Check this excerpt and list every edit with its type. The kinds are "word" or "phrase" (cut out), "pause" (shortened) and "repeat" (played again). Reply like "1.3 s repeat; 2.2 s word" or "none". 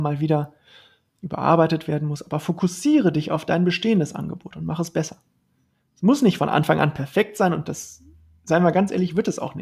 none